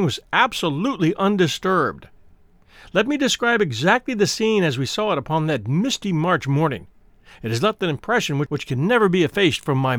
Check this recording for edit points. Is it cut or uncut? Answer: uncut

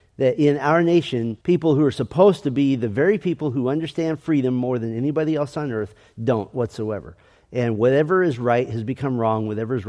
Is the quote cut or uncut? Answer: cut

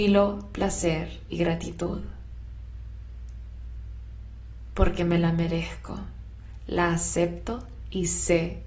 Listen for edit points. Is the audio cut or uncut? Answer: uncut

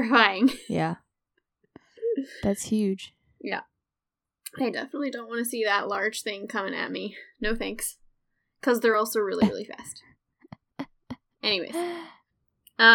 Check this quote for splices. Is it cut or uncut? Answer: uncut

